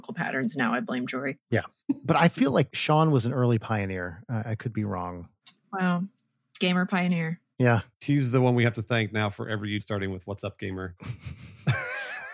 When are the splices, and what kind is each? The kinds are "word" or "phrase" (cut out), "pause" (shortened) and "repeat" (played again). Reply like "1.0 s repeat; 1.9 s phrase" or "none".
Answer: 9.8 s phrase